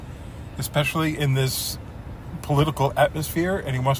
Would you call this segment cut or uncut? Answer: uncut